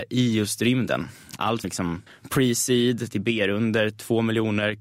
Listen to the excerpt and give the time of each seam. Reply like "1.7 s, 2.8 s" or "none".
1.6 s, 2.1 s